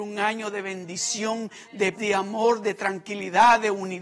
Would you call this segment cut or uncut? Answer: cut